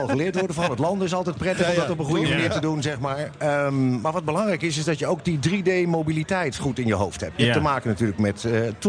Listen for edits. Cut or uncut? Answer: uncut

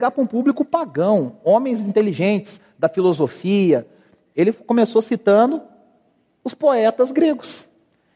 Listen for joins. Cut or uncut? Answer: uncut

